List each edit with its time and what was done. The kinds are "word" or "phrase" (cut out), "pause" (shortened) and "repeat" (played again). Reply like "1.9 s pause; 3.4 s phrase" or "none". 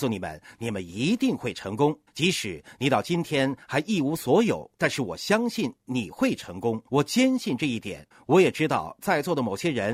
2.1 s pause; 4.7 s pause; 6.9 s pause; 8.1 s pause